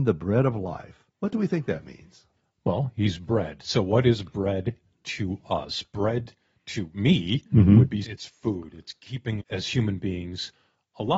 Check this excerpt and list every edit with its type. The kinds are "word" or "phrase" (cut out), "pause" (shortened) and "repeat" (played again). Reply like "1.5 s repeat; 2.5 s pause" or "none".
1.1 s pause; 8.0 s word; 9.4 s word